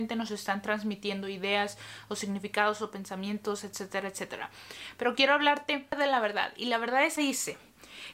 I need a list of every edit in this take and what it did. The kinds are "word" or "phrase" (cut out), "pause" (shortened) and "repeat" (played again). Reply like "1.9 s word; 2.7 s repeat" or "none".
7.2 s phrase